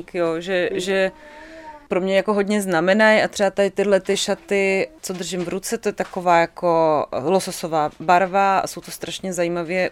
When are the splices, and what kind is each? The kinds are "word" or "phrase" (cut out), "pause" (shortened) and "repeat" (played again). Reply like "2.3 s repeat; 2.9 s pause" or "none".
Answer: none

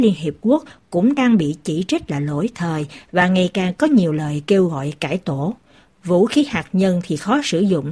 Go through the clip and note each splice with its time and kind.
none

